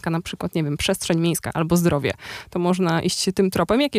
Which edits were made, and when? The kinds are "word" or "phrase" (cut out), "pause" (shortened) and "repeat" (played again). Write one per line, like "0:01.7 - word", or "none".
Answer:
none